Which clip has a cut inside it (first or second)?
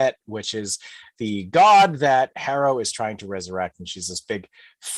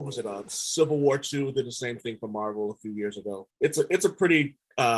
second